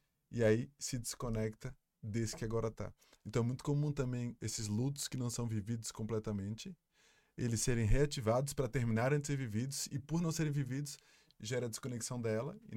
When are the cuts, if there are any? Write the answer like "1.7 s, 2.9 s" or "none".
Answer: none